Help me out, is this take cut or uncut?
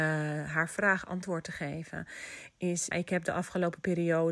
cut